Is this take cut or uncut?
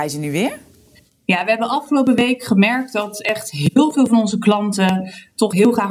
uncut